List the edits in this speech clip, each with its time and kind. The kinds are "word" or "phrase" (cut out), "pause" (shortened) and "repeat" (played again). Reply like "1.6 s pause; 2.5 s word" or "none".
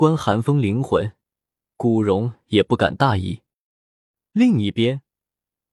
none